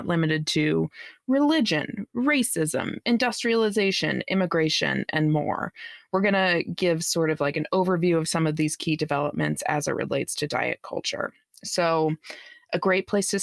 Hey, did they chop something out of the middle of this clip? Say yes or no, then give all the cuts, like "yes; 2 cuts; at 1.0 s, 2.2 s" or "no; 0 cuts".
no; 0 cuts